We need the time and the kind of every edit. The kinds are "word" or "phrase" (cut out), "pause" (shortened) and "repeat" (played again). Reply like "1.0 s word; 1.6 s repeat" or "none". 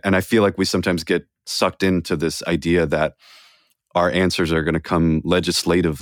none